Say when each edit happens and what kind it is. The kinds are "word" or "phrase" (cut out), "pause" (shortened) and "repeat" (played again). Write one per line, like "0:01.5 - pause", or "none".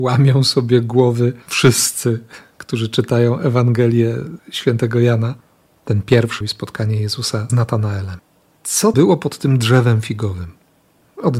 0:01.4 - pause
0:06.4 - word
0:07.5 - word
0:08.9 - word